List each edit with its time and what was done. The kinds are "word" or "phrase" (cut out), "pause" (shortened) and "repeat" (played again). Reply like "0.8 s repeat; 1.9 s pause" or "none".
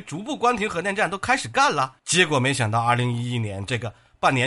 2.0 s pause